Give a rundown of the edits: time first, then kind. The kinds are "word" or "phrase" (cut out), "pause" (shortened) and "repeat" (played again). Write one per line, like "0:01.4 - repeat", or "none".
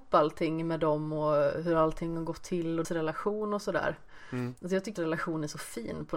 0:02.8 - word
0:05.0 - word